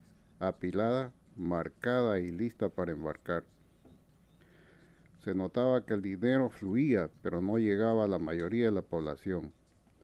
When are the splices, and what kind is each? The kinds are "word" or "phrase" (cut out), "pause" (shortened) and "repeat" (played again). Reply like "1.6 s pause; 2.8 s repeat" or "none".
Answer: none